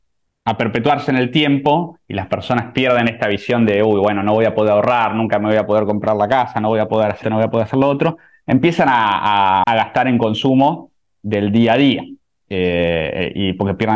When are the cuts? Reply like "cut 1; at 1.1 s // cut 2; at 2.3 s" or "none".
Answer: cut 1; at 7.2 s // cut 2; at 9.6 s